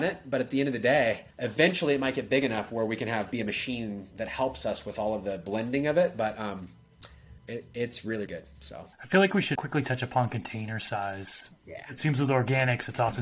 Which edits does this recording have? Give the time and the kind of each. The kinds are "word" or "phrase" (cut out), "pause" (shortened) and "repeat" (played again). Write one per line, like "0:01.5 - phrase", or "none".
0:01.3 - pause
0:03.3 - word
0:07.4 - pause
0:08.3 - word
0:08.9 - pause
0:09.6 - word